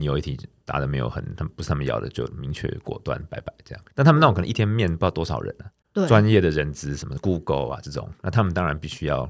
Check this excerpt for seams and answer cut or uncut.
cut